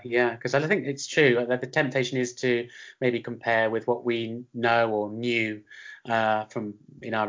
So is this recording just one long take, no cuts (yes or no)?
yes